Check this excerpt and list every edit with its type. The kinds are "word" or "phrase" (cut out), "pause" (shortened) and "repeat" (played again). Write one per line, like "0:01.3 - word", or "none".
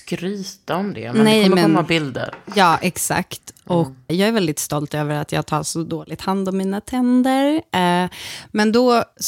0:04.1 - word